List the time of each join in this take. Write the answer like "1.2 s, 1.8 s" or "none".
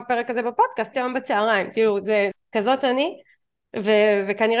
0.9 s, 2.3 s